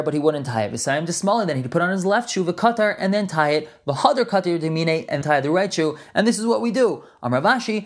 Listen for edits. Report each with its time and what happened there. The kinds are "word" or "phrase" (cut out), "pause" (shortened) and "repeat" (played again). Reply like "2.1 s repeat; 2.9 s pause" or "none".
5.2 s word